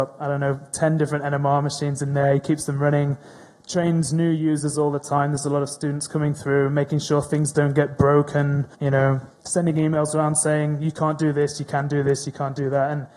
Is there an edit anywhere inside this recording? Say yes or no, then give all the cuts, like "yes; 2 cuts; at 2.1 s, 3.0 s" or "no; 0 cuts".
yes; 2 cuts; at 8.7 s, 9.3 s